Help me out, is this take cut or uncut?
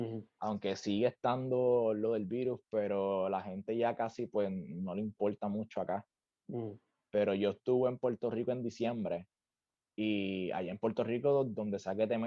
uncut